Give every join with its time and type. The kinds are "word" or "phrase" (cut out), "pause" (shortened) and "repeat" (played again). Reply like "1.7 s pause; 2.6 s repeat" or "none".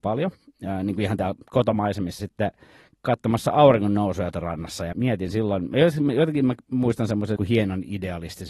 2.2 s word; 4.3 s phrase; 4.9 s word; 7.4 s word